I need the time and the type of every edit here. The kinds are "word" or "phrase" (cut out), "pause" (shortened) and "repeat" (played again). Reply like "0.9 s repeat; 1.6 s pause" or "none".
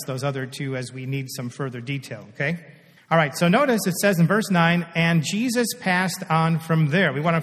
3.0 s pause